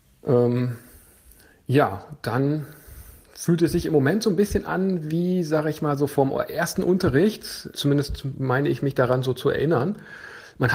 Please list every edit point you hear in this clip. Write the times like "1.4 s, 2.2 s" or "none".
7.7 s